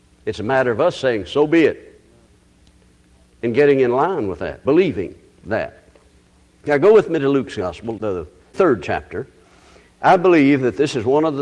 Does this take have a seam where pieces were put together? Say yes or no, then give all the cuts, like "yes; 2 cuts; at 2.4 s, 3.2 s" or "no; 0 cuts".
yes; 1 cut; at 4.6 s